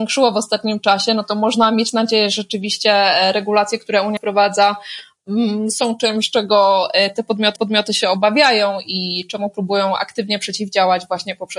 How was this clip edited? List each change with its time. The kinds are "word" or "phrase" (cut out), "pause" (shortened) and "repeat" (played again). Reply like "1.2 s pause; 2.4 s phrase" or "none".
4.2 s word; 7.6 s repeat